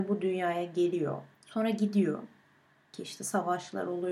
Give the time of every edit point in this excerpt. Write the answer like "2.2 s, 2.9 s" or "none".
none